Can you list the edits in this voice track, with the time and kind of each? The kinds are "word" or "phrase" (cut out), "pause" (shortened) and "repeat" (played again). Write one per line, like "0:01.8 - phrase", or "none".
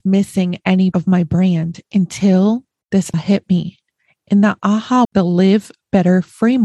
0:00.9 - word
0:03.1 - word
0:05.0 - word